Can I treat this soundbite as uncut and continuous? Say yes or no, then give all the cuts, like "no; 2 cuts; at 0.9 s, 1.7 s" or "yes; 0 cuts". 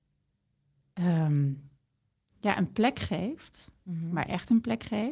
yes; 0 cuts